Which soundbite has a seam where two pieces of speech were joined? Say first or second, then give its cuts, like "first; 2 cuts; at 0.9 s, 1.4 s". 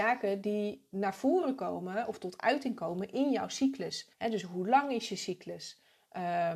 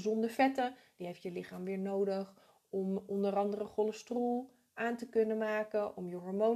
first; 1 cut; at 4.1 s